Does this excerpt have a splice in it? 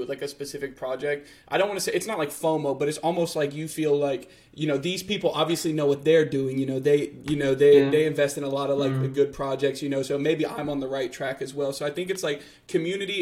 no; 0 cuts

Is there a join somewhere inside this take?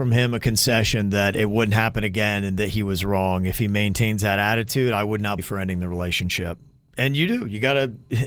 yes; 1 cut; at 5.4 s

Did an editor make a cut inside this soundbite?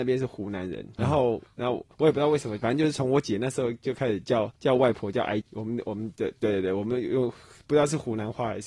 yes; 4 cuts; at 1.0 s, 1.9 s, 4.6 s, 5.4 s

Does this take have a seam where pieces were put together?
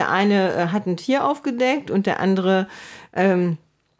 no; 0 cuts

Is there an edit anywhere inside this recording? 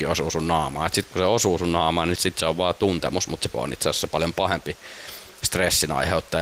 yes; 2 cuts; at 2.2 s, 3.5 s

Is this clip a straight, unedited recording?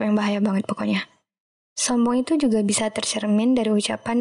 yes; 0 cuts

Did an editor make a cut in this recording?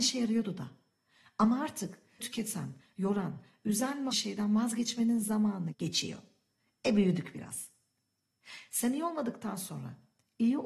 yes; 3 cuts; at 2.2 s, 4.1 s, 5.7 s

